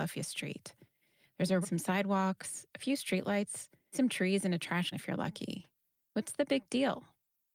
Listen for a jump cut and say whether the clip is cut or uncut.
cut